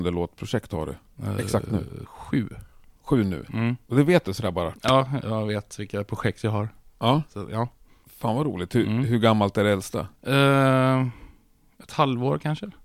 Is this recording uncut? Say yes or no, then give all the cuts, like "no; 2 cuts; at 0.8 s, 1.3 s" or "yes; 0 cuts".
no; 2 cuts; at 3.8 s, 10.2 s